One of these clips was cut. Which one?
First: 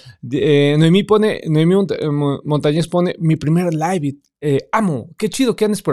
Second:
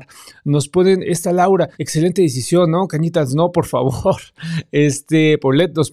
second; 1 cut; at 1.7 s

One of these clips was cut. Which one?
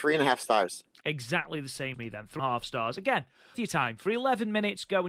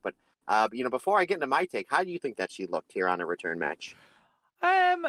first; 3 cuts; at 1.9 s, 2.4 s, 3.5 s

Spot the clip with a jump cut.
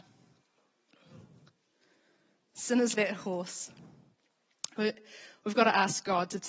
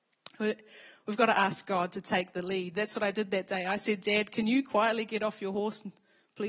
first; 1 cut; at 2.9 s

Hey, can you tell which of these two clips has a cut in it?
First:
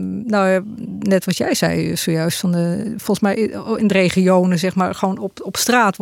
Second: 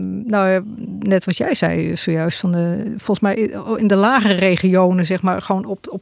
first; 1 cut; at 3.9 s

